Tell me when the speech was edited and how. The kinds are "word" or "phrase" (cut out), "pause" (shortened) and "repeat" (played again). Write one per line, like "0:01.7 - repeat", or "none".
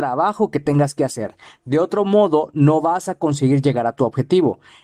none